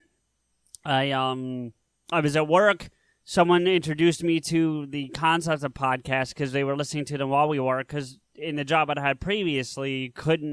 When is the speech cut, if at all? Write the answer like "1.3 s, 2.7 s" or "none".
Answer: none